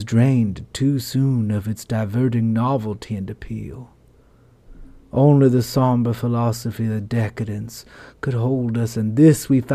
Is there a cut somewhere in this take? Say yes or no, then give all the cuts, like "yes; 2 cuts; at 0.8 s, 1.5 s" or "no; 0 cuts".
yes; 1 cut; at 5.0 s